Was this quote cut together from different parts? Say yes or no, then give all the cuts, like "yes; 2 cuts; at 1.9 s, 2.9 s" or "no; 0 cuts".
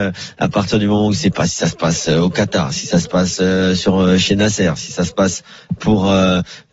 no; 0 cuts